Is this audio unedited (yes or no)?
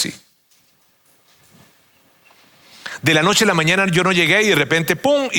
yes